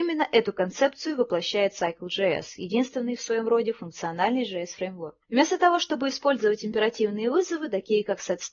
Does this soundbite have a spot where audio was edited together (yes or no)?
yes